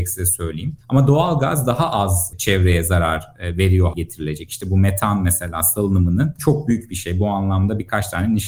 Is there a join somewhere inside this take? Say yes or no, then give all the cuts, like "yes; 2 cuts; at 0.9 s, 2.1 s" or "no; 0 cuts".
yes; 2 cuts; at 3.9 s, 6.4 s